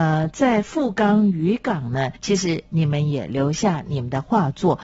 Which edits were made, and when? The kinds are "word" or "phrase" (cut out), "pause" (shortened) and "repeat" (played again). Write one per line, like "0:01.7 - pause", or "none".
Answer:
0:02.2 - pause